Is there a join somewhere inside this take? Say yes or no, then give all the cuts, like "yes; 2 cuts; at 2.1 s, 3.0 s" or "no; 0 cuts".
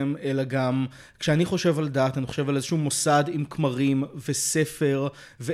no; 0 cuts